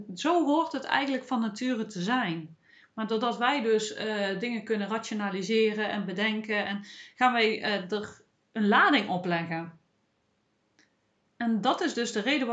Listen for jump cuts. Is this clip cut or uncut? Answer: uncut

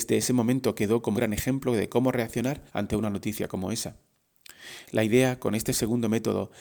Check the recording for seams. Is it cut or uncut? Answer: cut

